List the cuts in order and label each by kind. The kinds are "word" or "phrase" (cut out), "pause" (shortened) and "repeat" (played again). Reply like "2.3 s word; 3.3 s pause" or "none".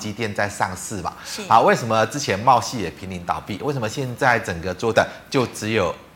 4.9 s word